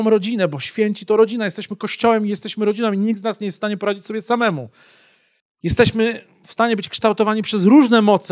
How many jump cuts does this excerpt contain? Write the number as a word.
zero